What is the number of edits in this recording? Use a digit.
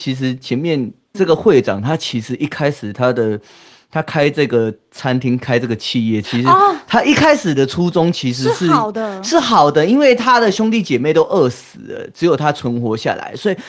1